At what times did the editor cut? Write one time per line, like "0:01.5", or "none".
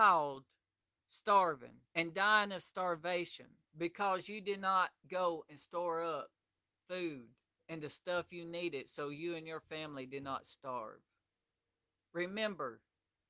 0:01.9
0:03.7
0:07.5

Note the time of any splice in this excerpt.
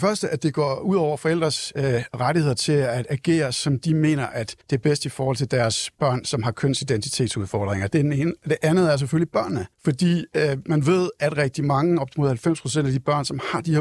0:04.6
0:09.7
0:11.4

